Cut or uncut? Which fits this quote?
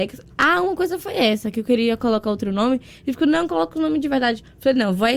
uncut